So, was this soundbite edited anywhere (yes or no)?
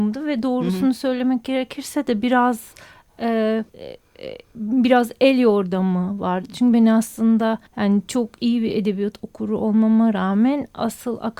yes